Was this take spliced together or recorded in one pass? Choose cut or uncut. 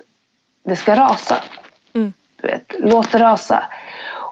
uncut